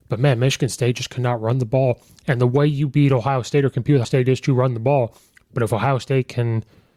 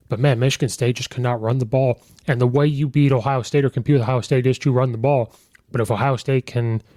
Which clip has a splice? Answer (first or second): first